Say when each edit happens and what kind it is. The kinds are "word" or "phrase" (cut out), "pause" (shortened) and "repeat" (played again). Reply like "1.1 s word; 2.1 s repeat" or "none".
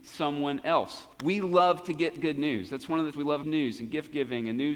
1.1 s pause; 3.1 s word; 3.4 s phrase